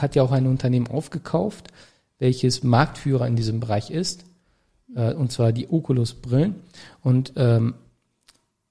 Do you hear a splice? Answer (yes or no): no